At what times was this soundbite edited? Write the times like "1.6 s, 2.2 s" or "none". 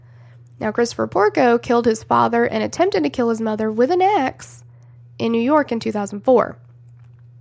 none